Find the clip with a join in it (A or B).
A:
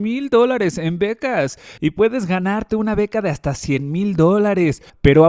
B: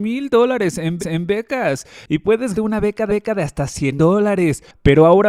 B